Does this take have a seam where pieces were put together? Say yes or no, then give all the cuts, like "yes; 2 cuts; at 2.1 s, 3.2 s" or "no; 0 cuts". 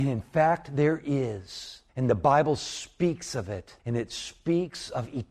yes; 2 cuts; at 1.9 s, 3.8 s